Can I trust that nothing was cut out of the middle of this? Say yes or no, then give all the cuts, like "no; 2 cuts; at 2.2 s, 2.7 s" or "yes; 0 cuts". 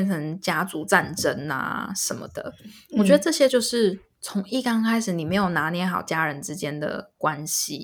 yes; 0 cuts